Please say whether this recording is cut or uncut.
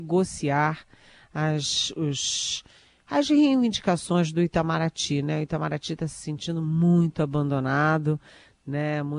uncut